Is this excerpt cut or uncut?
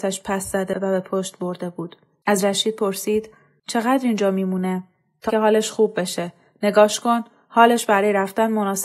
cut